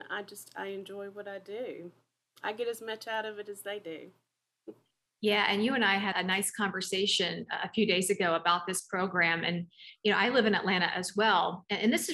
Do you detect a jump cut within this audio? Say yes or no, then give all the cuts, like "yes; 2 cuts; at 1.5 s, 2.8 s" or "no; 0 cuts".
yes; 1 cut; at 6.1 s